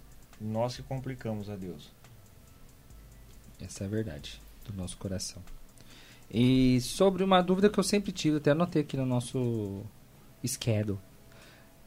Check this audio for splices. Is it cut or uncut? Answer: uncut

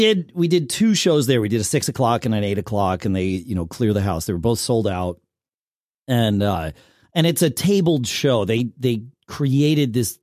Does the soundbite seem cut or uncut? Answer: uncut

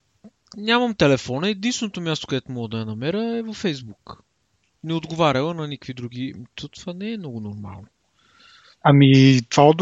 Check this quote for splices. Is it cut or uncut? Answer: uncut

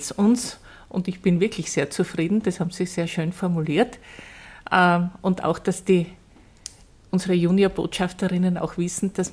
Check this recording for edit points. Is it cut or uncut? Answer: uncut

